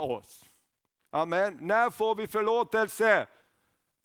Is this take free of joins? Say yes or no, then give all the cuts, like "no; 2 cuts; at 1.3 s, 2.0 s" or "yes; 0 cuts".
yes; 0 cuts